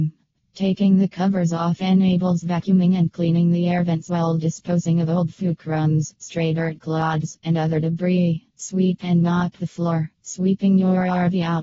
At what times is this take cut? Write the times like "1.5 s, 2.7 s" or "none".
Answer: 8.5 s, 10.1 s